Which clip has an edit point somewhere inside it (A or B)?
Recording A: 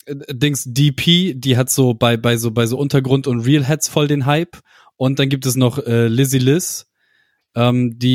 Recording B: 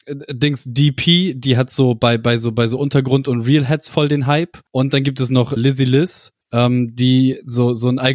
B